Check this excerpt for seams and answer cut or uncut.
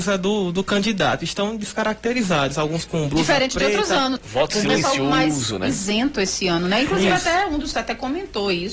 cut